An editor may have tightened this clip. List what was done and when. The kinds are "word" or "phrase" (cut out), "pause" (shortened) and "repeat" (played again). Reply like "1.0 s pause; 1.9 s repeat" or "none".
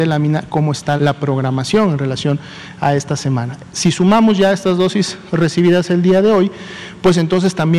1.0 s word